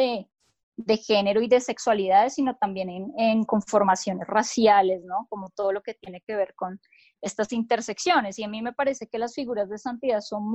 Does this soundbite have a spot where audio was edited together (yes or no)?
no